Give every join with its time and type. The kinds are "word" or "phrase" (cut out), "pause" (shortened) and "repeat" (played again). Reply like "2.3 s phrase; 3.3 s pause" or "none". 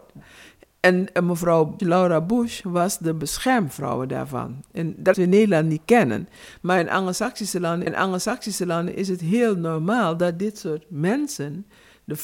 1.8 s word; 5.1 s phrase; 7.9 s repeat